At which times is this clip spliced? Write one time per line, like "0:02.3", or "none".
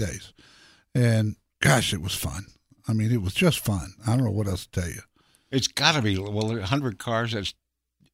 none